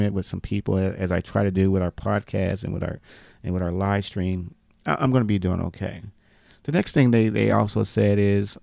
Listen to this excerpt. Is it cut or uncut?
uncut